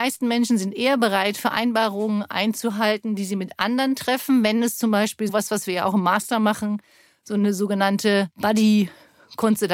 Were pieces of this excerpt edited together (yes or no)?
no